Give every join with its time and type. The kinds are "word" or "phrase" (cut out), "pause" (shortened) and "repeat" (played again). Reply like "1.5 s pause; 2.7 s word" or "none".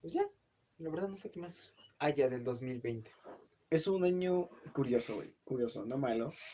none